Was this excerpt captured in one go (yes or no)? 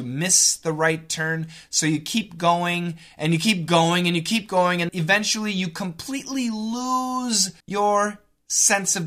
no